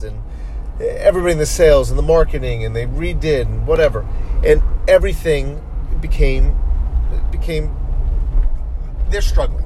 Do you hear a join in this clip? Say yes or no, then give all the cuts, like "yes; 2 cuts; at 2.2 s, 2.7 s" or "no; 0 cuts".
no; 0 cuts